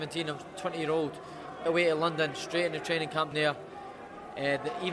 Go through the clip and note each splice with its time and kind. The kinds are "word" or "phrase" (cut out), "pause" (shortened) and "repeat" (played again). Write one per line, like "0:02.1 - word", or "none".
0:01.7 - phrase
0:03.3 - word

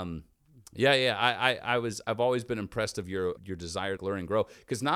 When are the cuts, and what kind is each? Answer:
0:03.4 - word
0:04.0 - word

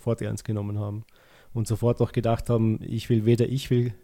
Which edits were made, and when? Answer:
none

